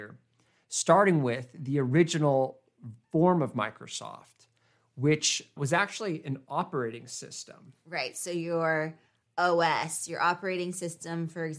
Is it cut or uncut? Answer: uncut